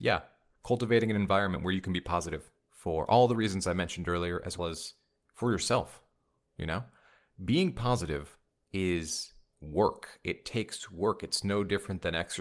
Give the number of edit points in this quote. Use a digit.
2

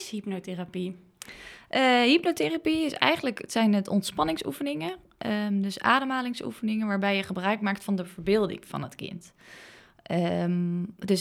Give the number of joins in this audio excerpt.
0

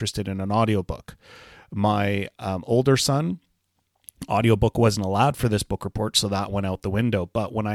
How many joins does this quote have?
0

